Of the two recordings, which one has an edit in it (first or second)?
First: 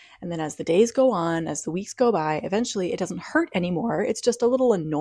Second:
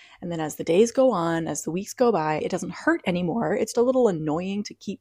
second